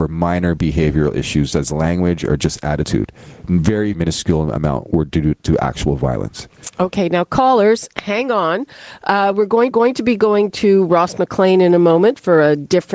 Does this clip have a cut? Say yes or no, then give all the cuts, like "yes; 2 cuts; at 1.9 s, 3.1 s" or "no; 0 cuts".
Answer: yes; 3 cuts; at 1.5 s, 3.9 s, 9.7 s